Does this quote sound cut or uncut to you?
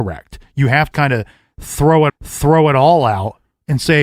cut